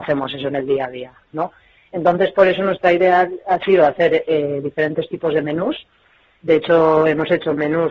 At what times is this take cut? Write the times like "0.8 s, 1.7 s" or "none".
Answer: none